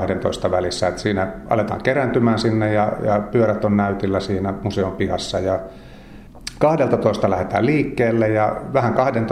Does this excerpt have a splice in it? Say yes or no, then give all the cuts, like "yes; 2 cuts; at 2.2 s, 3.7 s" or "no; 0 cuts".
no; 0 cuts